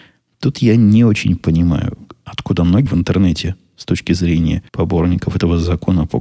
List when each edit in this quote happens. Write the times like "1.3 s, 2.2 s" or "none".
2.9 s, 4.7 s